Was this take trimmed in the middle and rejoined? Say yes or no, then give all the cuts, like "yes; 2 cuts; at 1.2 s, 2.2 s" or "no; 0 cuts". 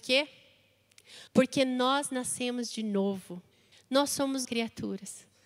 yes; 3 cuts; at 1.3 s, 3.7 s, 4.4 s